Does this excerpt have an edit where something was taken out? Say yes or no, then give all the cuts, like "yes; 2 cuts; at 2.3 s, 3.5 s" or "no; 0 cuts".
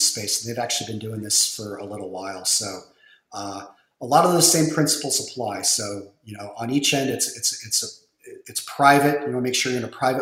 no; 0 cuts